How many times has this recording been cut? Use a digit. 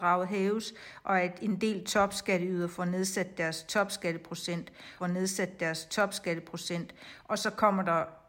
1